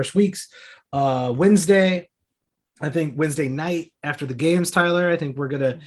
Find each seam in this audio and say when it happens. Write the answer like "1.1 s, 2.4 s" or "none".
none